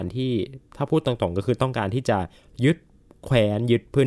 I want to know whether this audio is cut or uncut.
uncut